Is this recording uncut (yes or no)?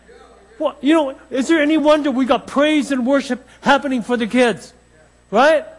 yes